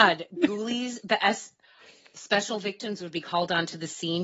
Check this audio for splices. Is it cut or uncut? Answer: uncut